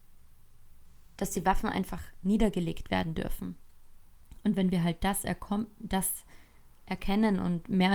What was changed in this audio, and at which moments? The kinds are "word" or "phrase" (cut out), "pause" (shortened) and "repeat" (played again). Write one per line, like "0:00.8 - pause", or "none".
none